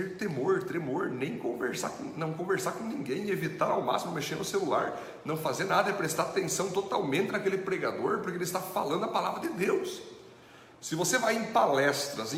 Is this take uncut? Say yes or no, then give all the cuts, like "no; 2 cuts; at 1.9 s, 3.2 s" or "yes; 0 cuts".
yes; 0 cuts